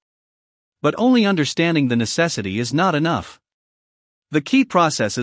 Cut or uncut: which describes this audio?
uncut